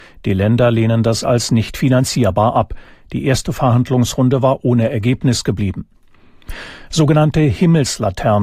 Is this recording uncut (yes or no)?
yes